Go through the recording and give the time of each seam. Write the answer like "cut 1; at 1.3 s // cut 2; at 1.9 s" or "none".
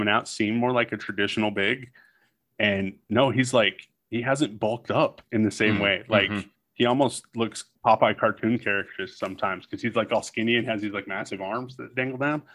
cut 1; at 3.0 s // cut 2; at 6.6 s // cut 3; at 7.8 s